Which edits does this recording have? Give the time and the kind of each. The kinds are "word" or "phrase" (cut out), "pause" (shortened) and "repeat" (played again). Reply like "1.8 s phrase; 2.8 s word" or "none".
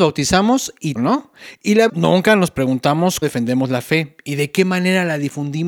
1.0 s word; 1.9 s word; 3.2 s word